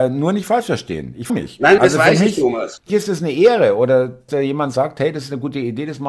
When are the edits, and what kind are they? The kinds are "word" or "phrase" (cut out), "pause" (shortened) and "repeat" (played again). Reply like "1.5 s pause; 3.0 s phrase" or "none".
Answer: 1.3 s word; 1.8 s word; 2.9 s word; 4.3 s word